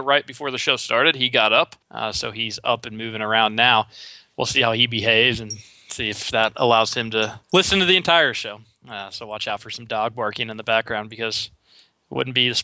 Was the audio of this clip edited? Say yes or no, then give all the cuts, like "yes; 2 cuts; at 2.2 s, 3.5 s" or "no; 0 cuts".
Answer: yes; 2 cuts; at 1.8 s, 7.4 s